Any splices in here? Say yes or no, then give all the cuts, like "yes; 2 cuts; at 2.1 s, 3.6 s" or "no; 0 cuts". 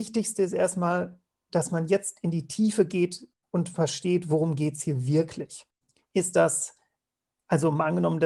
no; 0 cuts